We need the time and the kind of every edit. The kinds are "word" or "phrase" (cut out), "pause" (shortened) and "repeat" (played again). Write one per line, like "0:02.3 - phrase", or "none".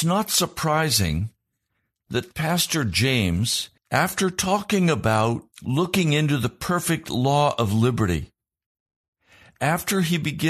0:03.8 - pause
0:05.5 - pause